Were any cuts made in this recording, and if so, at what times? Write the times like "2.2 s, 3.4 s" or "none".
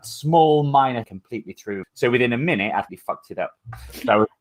1.0 s, 1.8 s, 2.9 s